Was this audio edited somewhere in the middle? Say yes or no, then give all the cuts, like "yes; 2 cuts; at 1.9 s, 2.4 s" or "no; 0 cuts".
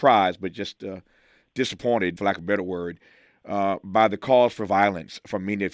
yes; 1 cut; at 2.2 s